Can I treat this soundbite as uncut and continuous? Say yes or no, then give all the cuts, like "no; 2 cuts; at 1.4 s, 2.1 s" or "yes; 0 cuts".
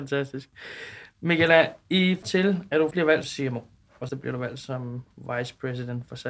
no; 4 cuts; at 2.2 s, 2.9 s, 3.2 s, 4.1 s